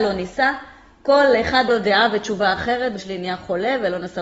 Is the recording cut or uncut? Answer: cut